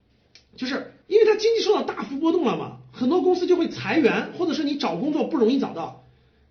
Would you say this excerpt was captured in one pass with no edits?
no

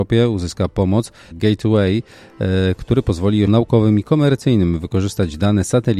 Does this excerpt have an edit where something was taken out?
yes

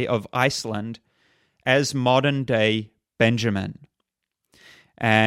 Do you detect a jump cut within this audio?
no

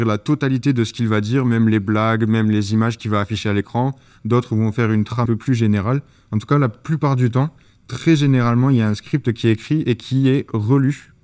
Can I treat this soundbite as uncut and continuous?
no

